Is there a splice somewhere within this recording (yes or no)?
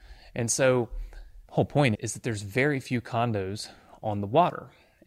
yes